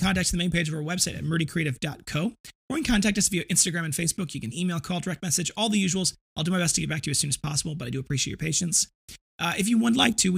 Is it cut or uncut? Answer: cut